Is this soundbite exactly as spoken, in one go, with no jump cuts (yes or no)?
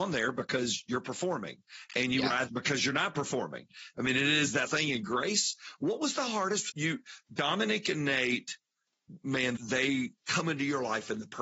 no